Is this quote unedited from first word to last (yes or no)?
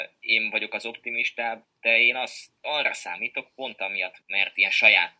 no